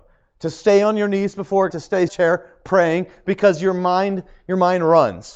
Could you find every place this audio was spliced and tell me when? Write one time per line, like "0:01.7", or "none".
0:01.7
0:02.1